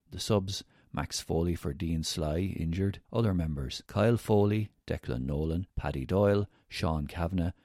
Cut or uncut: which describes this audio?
cut